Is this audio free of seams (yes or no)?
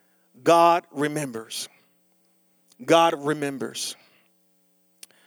yes